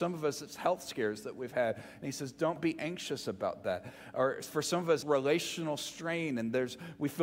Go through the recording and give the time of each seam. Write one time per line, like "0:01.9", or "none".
0:05.0